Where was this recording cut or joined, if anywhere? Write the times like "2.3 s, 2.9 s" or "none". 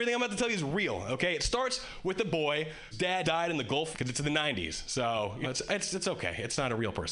2.9 s, 3.2 s, 3.9 s, 5.4 s

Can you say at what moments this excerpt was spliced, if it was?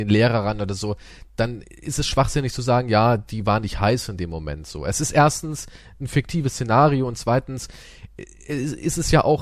none

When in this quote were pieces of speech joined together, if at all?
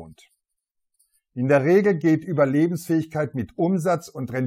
none

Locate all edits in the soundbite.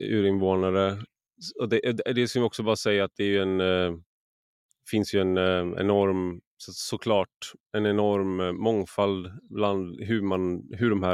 none

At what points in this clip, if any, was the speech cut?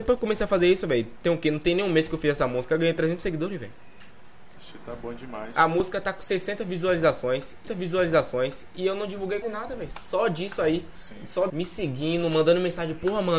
7.7 s, 9.4 s, 11.5 s

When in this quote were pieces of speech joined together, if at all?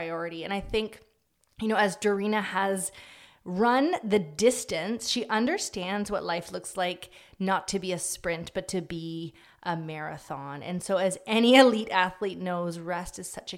none

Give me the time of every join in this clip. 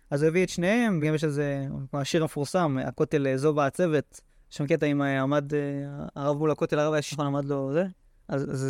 1.0 s, 4.3 s, 7.1 s

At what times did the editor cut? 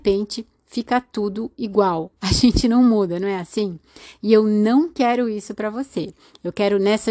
none

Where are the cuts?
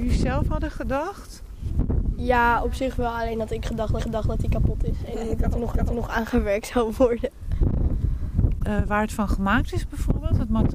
4.0 s, 5.7 s, 8.6 s

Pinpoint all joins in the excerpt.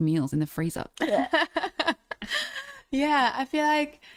none

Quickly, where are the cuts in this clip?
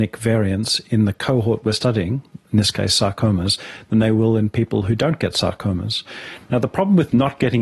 none

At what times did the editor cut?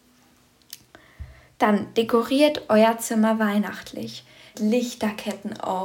4.5 s

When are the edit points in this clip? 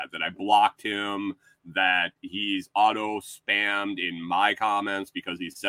none

